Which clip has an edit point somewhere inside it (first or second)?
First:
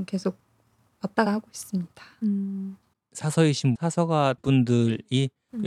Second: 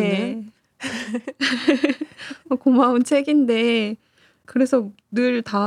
first